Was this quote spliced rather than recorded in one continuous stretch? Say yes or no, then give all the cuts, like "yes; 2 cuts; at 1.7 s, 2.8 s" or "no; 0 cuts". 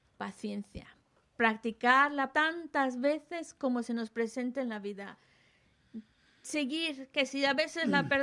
yes; 1 cut; at 2.3 s